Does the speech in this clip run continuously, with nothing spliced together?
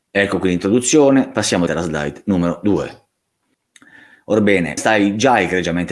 no; 2 cuts; at 1.7 s, 4.8 s

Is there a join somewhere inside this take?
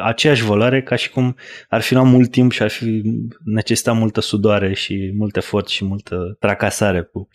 no; 0 cuts

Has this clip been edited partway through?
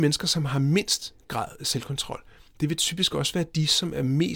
no; 0 cuts

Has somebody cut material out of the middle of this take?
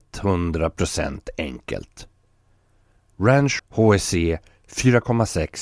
yes; 1 cut; at 3.6 s

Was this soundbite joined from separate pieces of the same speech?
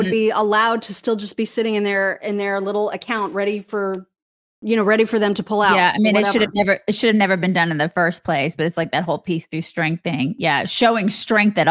no; 0 cuts

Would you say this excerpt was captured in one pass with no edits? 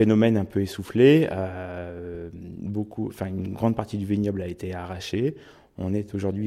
yes; 0 cuts

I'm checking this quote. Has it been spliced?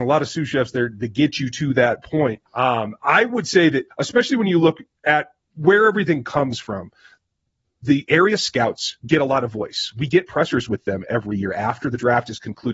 yes; 2 cuts; at 2.5 s, 3.9 s

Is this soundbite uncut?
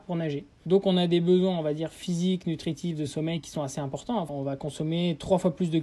yes; 0 cuts

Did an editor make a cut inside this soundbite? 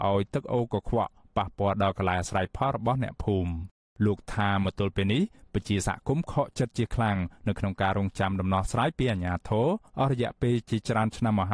no; 0 cuts

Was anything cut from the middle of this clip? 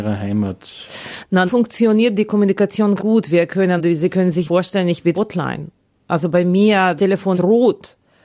yes; 7 cuts; at 1.5 s, 3.0 s, 3.8 s, 4.5 s, 5.1 s, 7.0 s, 7.3 s

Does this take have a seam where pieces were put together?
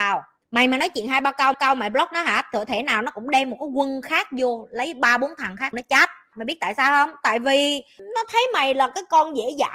yes; 2 cuts; at 1.5 s, 5.7 s

